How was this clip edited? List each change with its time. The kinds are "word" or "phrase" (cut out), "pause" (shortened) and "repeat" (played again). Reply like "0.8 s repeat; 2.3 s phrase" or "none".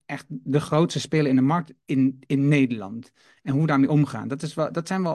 1.8 s pause